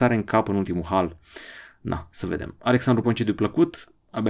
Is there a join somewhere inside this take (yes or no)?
yes